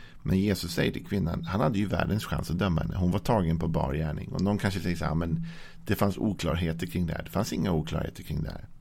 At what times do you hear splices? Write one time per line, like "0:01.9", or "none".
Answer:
none